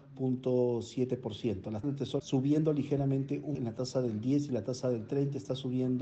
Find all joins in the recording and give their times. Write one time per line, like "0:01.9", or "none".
0:01.8
0:02.2
0:03.5